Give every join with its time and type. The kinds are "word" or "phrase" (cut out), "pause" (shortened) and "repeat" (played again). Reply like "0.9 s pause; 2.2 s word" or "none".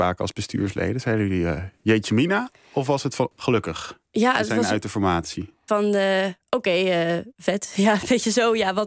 3.3 s word; 5.7 s phrase